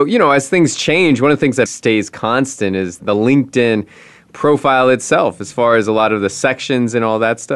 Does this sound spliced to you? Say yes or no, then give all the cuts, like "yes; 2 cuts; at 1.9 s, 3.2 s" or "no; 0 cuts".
yes; 2 cuts; at 1.7 s, 3.0 s